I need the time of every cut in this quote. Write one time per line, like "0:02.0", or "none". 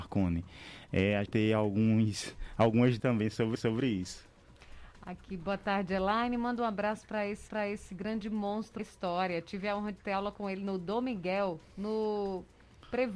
0:01.3
0:03.0
0:03.6
0:07.5
0:08.8
0:11.6